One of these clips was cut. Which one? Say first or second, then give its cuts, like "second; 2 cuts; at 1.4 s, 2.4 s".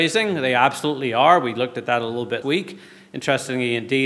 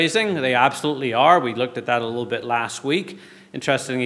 first; 1 cut; at 2.4 s